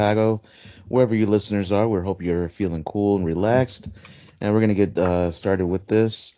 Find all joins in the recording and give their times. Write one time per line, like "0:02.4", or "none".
none